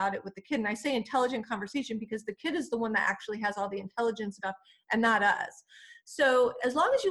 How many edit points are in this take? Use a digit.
1